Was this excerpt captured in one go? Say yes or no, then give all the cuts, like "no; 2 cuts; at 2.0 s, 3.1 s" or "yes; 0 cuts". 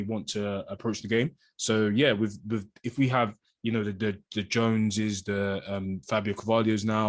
yes; 0 cuts